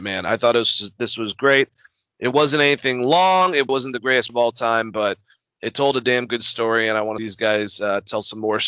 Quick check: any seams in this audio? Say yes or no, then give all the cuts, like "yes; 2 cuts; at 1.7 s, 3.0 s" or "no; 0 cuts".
yes; 3 cuts; at 3.7 s, 4.3 s, 7.2 s